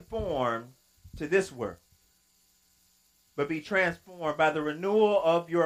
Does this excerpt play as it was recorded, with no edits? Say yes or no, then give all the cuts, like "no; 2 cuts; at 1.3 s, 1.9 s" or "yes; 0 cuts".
yes; 0 cuts